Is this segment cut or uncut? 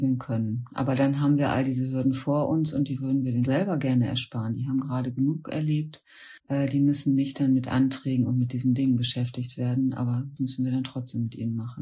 cut